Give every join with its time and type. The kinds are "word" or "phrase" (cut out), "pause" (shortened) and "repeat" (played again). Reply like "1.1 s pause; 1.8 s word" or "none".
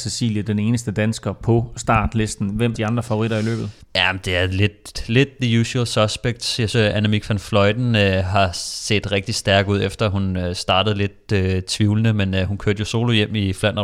2.7 s word; 3.9 s pause; 6.7 s word